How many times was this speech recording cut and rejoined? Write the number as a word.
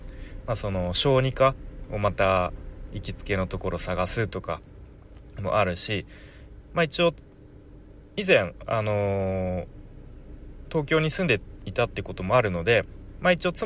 zero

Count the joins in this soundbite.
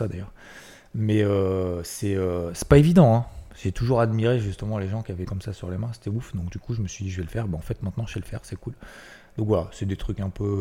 one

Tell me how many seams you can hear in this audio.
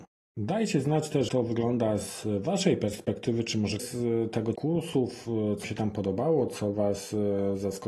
four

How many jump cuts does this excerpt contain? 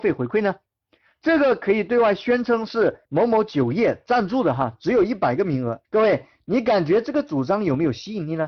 two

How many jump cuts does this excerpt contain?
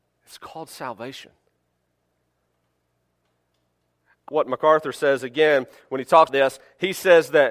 two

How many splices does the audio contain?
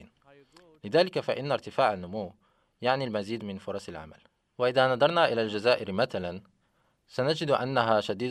one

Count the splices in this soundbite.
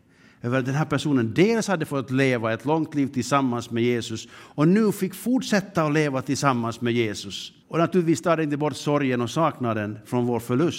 one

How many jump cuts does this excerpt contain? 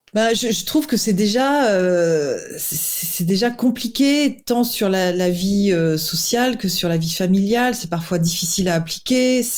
zero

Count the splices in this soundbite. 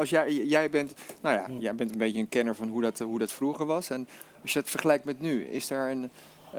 zero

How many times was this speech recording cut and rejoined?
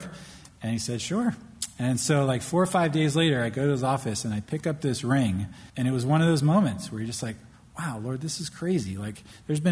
one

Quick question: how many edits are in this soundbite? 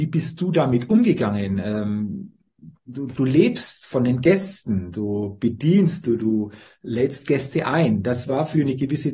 zero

